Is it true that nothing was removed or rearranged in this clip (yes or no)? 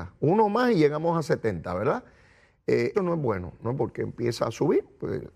no